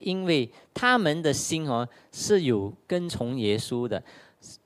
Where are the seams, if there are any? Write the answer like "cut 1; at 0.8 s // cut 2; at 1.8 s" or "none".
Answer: none